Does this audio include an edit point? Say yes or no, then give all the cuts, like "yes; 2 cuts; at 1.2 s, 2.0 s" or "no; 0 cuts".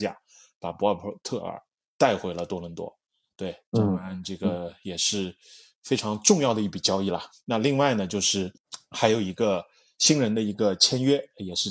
no; 0 cuts